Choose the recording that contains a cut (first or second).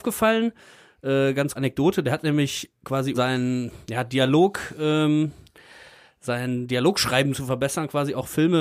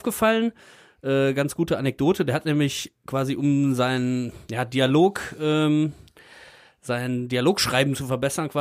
first